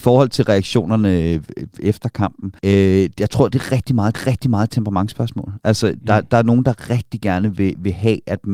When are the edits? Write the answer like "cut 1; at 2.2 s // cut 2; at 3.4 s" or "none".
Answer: cut 1; at 2.6 s // cut 2; at 4.1 s